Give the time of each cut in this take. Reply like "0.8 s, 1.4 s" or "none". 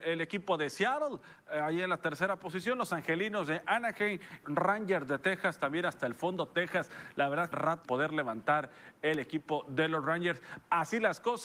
4.4 s, 7.5 s, 7.8 s